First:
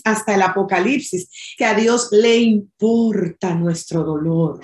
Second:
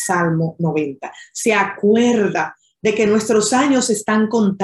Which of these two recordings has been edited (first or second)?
first